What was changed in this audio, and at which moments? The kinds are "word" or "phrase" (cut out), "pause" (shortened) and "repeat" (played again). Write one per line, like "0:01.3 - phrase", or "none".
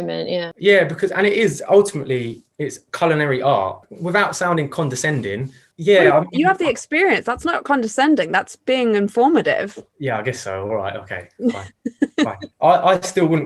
none